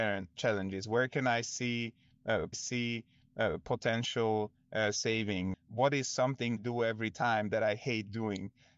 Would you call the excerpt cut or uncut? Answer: cut